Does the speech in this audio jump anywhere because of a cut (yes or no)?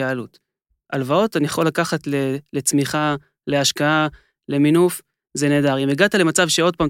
no